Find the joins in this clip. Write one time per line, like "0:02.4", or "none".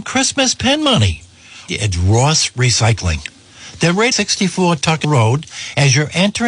0:01.7
0:04.1
0:05.0